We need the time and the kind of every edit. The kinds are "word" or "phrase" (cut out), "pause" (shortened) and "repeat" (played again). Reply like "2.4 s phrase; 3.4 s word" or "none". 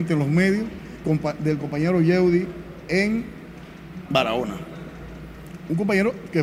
1.0 s word